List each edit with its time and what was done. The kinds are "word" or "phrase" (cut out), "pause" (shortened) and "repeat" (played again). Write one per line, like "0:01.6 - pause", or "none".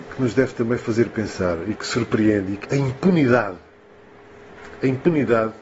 0:01.8 - word
0:02.6 - word